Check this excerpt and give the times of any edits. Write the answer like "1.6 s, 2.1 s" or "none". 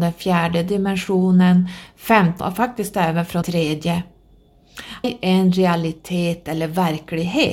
2.4 s, 3.4 s, 5.0 s